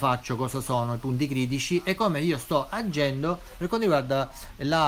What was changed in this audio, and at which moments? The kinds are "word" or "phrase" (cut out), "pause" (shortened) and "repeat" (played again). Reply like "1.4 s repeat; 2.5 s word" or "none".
none

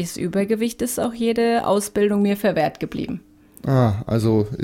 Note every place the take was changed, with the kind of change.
none

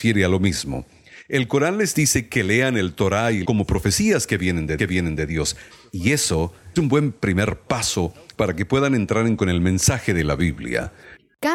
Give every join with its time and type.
3.4 s phrase; 4.8 s repeat; 6.8 s word; 9.4 s word

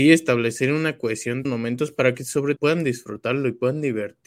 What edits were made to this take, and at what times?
1.4 s phrase; 2.6 s word

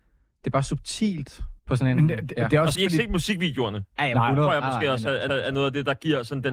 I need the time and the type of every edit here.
1.6 s pause; 2.7 s word; 5.3 s repeat

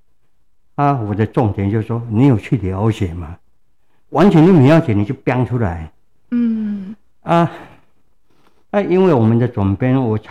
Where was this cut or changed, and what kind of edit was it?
none

